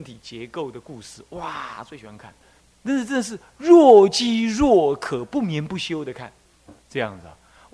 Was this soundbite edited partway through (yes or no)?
yes